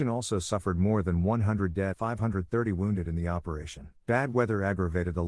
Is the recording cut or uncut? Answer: cut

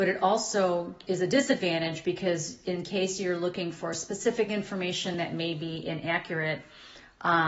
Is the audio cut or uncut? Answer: uncut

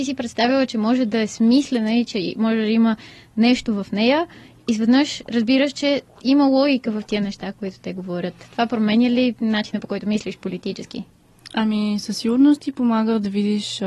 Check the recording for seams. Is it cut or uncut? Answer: uncut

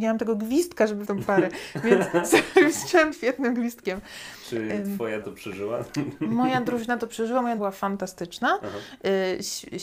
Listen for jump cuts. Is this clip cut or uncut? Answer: cut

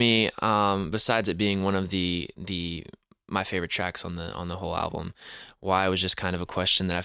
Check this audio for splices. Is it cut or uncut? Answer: uncut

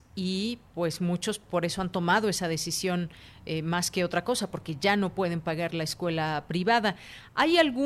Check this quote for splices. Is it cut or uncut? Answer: uncut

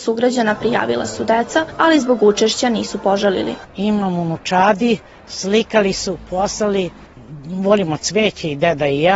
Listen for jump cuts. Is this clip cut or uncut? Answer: uncut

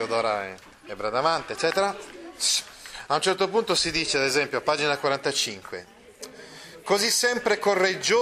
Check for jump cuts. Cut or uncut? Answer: uncut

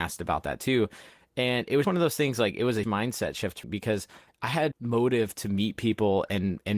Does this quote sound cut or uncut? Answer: cut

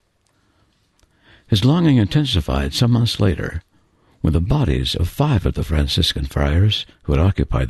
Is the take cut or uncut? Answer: uncut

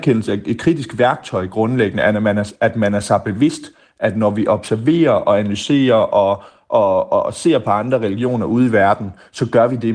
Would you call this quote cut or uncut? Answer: uncut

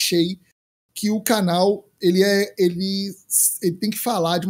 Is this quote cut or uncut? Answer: uncut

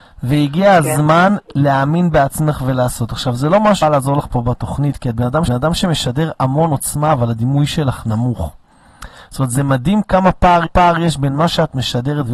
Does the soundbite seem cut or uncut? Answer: cut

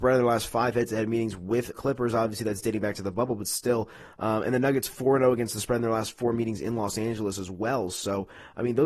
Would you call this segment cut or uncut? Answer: cut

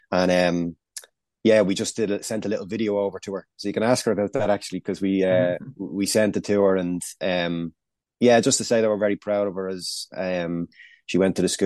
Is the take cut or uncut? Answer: uncut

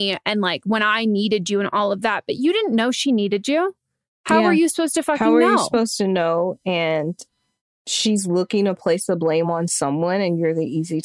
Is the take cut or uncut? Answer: uncut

